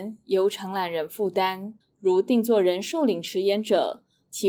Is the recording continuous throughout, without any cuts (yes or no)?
no